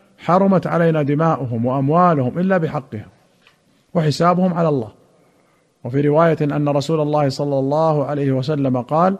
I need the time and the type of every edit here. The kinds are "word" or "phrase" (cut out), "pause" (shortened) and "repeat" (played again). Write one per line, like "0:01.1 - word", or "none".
none

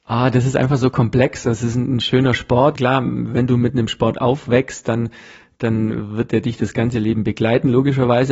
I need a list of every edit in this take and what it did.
none

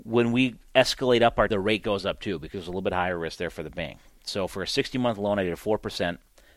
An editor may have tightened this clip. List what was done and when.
0:01.5 - phrase

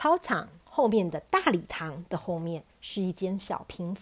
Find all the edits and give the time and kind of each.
0:02.7 - pause

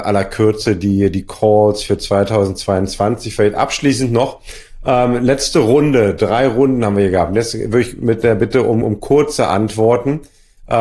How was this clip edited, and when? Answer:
none

